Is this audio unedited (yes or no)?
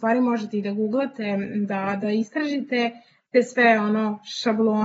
yes